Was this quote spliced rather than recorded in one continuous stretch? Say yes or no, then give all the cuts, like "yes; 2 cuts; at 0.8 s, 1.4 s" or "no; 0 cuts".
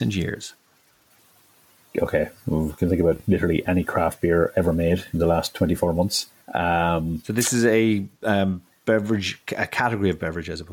yes; 3 cuts; at 1.2 s, 6.4 s, 8.1 s